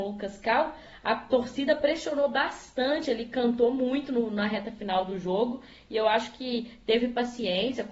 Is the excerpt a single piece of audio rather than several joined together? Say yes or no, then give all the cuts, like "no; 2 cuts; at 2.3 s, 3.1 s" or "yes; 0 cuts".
yes; 0 cuts